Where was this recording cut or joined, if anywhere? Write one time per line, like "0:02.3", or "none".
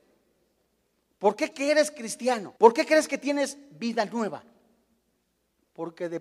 0:01.5
0:02.6